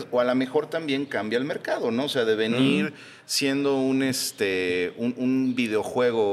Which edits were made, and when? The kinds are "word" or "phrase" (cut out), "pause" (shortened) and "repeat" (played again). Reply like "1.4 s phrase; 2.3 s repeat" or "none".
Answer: none